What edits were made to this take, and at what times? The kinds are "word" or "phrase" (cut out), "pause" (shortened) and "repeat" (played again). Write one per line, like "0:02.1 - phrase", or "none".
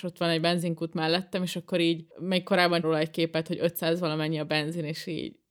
0:02.1 - pause
0:02.8 - word